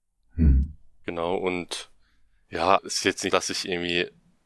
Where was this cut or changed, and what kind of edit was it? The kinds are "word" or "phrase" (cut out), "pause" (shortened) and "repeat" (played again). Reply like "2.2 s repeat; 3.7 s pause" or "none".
2.8 s word; 3.3 s word